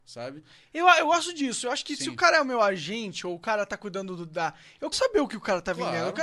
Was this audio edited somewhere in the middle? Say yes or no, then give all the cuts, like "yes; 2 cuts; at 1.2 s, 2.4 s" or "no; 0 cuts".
yes; 1 cut; at 4.9 s